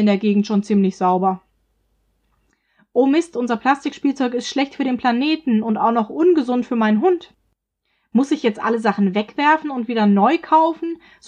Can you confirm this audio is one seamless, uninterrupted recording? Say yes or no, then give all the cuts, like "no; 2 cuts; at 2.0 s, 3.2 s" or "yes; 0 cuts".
yes; 0 cuts